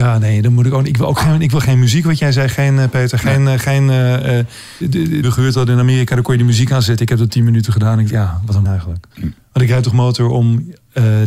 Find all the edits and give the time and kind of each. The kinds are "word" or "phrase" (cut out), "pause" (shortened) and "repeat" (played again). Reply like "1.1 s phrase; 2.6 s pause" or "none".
4.8 s word; 5.2 s phrase; 8.1 s word; 8.6 s word; 9.1 s pause